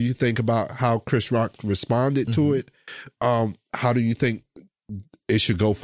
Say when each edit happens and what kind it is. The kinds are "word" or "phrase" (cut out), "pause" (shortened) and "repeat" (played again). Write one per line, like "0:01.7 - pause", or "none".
none